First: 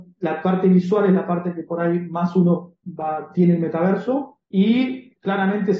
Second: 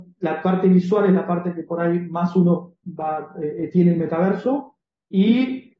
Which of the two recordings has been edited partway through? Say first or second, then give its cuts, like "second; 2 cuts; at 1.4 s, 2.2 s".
first; 2 cuts; at 3.3 s, 4.4 s